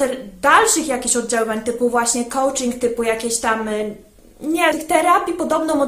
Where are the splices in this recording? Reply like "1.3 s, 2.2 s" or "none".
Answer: 4.7 s

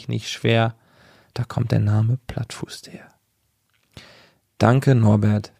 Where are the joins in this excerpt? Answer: none

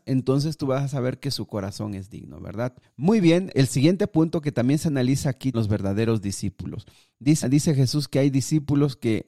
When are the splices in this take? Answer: 2.8 s, 3.5 s, 5.5 s, 7.4 s

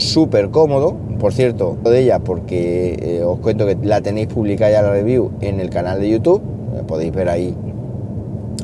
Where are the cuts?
1.9 s, 3.8 s

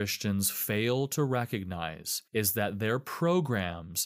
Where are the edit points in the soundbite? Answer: 2.3 s

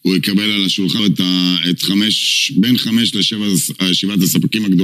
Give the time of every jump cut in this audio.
1.0 s

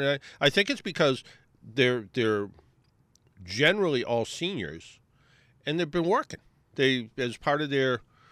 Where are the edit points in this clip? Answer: none

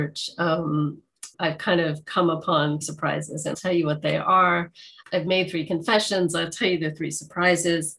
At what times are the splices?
1.3 s, 2.8 s, 3.5 s, 5.0 s

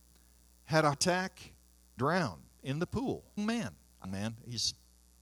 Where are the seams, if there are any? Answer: 0.9 s, 2.0 s, 3.4 s, 4.0 s

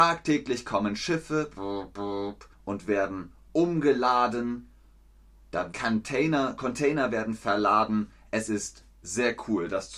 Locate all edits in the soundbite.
2.5 s, 5.7 s

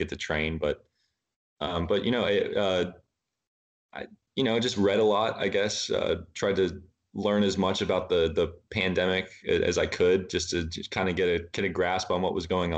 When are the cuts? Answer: none

